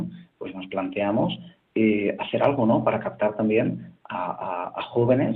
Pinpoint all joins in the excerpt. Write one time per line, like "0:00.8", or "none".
none

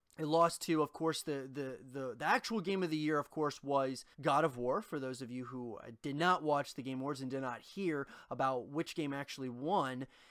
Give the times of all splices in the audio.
0:04.1

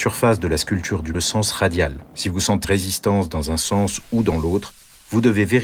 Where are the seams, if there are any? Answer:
0:01.1
0:02.1
0:02.6

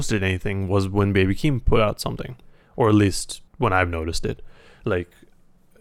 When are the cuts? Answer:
0:03.5

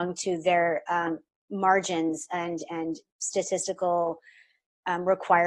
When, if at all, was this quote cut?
none

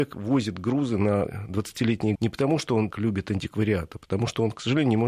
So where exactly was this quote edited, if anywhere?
0:02.1
0:02.9

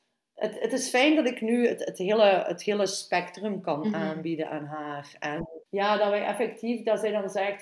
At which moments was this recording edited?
0:05.7

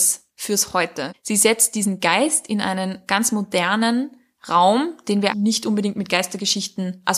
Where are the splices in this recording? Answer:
0:05.3

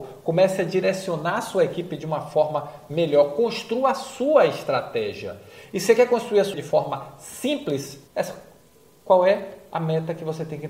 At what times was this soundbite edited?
0:06.5
0:08.1

